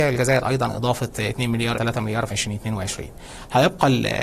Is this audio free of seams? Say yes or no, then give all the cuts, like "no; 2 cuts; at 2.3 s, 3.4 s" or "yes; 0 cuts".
no; 2 cuts; at 1.8 s, 2.3 s